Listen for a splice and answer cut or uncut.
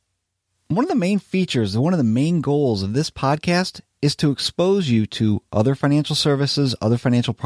uncut